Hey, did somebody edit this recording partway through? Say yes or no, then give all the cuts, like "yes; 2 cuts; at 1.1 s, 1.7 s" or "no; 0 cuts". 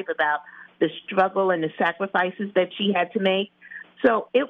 no; 0 cuts